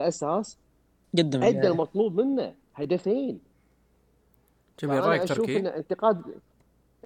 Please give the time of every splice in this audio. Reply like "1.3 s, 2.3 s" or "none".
2.6 s

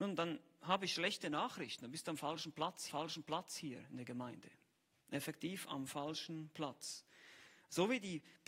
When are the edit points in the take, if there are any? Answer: 2.9 s

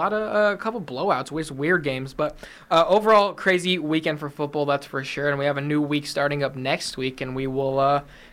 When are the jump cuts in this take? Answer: none

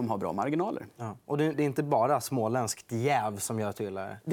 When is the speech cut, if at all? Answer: 1.5 s

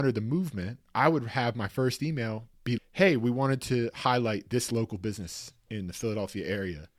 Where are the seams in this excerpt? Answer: 2.8 s

